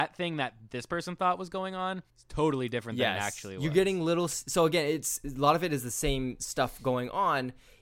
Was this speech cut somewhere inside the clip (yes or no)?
yes